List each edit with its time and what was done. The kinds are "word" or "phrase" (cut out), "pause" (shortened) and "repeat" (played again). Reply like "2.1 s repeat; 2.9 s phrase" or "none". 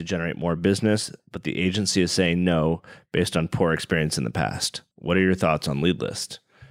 4.9 s pause